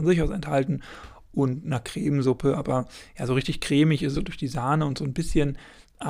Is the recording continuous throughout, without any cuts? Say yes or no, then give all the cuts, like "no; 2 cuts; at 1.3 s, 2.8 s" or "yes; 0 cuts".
no; 1 cut; at 4.1 s